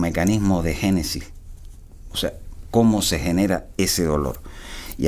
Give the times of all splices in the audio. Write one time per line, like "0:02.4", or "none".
none